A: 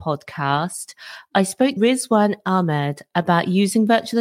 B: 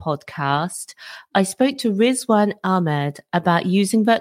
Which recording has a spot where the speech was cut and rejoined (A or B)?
A